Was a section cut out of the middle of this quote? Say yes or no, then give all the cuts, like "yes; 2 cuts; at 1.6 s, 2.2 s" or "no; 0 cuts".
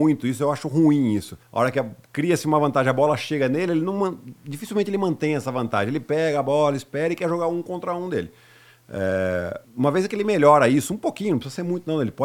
yes; 2 cuts; at 1.4 s, 9.6 s